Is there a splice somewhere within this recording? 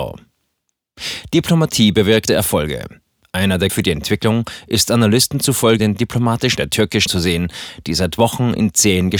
yes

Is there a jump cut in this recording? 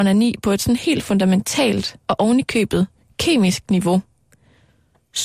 yes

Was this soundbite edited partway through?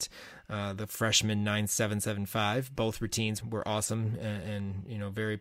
yes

